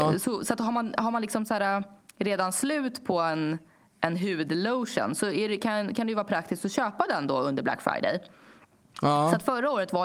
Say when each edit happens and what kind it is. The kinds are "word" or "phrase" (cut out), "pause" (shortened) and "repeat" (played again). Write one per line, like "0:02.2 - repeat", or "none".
none